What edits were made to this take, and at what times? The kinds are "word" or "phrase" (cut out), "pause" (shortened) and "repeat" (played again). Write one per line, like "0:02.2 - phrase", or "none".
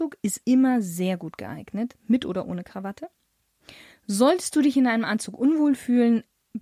none